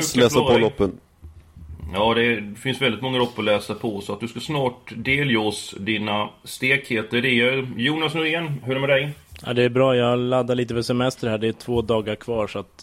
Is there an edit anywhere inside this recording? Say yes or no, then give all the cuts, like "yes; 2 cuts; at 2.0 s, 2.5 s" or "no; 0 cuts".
no; 0 cuts